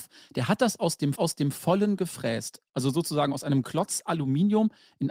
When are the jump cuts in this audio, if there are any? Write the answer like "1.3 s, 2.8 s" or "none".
1.2 s, 3.6 s